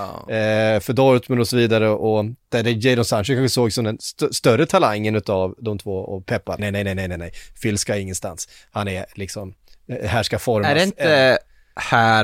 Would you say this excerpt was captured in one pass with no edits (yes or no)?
no